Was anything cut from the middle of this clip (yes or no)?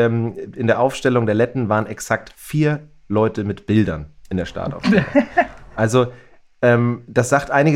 no